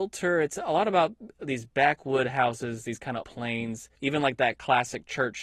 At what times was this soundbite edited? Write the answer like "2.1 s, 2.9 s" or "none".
3.2 s, 3.9 s